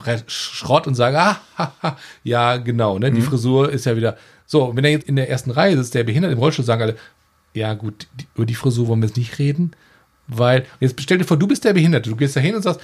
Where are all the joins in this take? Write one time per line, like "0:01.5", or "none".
0:05.0

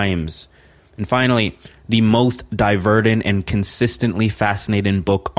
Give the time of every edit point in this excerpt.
none

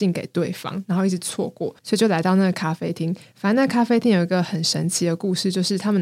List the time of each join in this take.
0:01.8

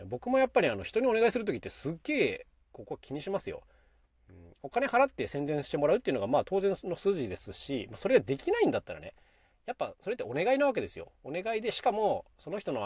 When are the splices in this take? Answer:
none

